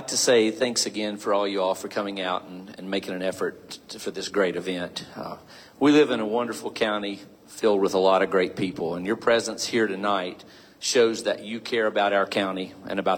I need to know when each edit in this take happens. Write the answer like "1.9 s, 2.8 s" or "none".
none